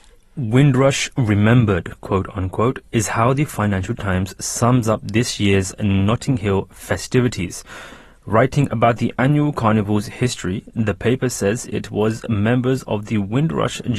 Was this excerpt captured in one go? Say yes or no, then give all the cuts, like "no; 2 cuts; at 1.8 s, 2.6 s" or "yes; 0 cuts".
yes; 0 cuts